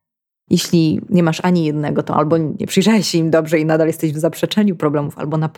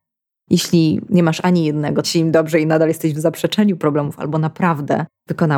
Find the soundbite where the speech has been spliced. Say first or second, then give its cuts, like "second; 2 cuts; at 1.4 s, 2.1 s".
second; 1 cut; at 2.0 s